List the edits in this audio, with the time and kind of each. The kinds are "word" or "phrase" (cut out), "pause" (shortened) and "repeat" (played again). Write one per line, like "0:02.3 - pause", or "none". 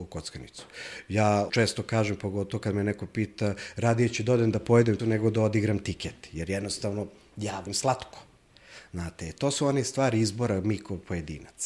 0:01.5 - word
0:05.0 - word
0:07.7 - word